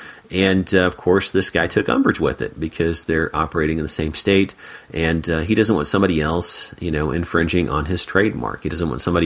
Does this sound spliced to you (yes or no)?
no